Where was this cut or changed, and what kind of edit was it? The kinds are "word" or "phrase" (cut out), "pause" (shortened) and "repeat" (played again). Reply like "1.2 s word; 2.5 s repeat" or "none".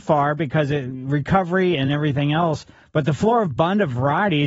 none